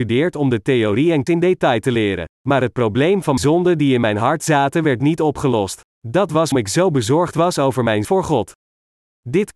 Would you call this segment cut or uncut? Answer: cut